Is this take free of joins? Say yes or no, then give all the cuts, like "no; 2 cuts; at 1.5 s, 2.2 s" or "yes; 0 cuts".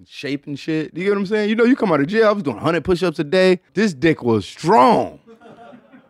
no; 1 cut; at 3.7 s